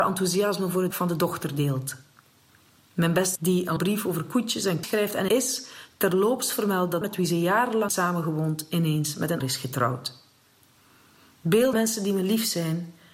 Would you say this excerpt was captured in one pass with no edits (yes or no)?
no